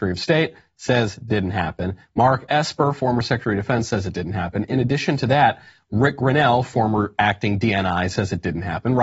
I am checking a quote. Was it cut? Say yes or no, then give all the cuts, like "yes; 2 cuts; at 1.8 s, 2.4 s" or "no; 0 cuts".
no; 0 cuts